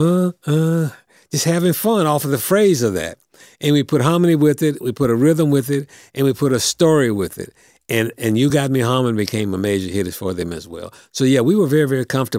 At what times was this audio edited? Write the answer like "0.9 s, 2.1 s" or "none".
none